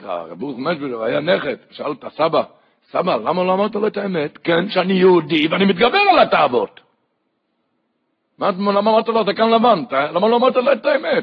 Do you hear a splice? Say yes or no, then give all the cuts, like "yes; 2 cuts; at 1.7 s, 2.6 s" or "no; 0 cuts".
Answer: no; 0 cuts